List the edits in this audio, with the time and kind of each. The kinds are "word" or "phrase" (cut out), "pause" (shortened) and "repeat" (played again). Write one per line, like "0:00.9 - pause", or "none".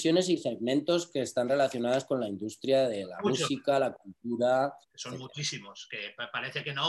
0:04.8 - pause